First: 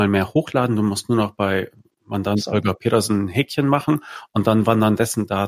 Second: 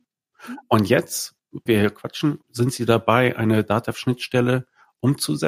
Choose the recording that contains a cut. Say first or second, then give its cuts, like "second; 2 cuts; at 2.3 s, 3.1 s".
second; 2 cuts; at 1.7 s, 2.4 s